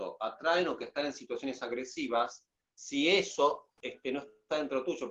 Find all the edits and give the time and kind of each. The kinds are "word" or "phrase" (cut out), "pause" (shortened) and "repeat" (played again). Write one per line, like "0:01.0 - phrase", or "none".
0:02.6 - pause
0:03.8 - pause